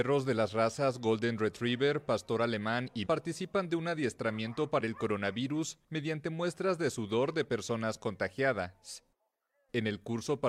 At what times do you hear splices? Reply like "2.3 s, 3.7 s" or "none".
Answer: 3.1 s, 4.8 s